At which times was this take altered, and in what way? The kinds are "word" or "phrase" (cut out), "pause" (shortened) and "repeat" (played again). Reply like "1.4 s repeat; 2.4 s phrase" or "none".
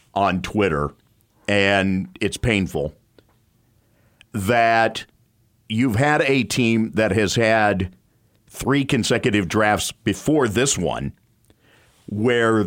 none